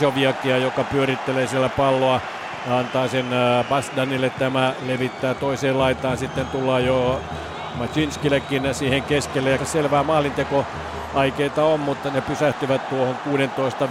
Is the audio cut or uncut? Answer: cut